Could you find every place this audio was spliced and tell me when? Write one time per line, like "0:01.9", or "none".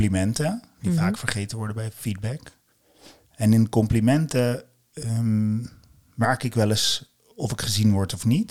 none